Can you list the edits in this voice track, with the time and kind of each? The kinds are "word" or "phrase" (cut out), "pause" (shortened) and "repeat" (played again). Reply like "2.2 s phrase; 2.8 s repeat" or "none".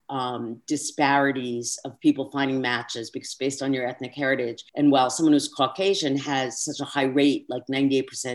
4.7 s pause